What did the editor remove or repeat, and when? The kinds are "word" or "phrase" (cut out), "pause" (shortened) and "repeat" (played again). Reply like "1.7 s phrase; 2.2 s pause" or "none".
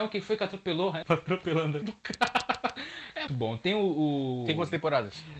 1.0 s phrase; 1.8 s word; 3.3 s word